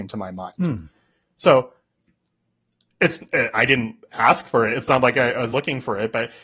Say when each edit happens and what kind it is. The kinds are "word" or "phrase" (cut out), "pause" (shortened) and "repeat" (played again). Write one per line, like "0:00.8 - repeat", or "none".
0:05.5 - word